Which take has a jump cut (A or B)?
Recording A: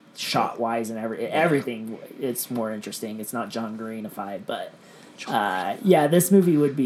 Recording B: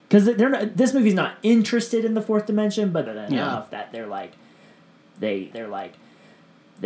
B